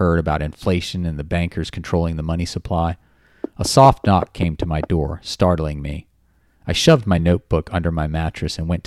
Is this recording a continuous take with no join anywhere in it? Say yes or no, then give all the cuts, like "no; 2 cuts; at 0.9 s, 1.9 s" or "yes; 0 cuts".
yes; 0 cuts